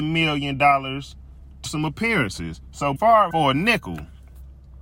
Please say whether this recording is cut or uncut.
cut